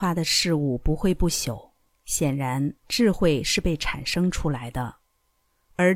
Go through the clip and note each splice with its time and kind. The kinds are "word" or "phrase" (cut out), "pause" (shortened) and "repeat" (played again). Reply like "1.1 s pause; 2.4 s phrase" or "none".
1.9 s pause; 2.8 s pause